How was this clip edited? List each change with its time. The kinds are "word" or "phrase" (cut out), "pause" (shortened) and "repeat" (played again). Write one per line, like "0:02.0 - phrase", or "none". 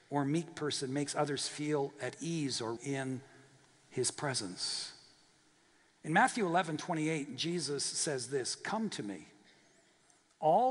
0:02.8 - word